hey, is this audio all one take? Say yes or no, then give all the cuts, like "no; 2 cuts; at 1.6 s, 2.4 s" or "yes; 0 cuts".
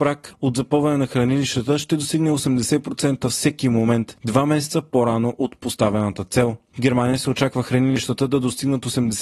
yes; 0 cuts